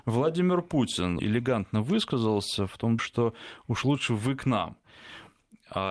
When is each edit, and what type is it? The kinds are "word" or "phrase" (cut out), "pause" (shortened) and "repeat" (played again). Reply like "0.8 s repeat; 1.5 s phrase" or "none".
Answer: 1.2 s word; 3.0 s word